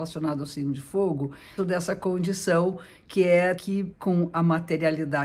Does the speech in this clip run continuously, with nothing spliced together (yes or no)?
no